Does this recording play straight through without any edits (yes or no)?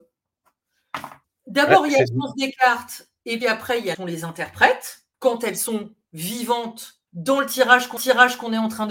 no